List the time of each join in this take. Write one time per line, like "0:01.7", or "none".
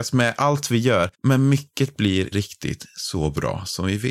0:01.1
0:02.3